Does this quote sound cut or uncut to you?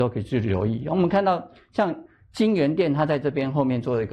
uncut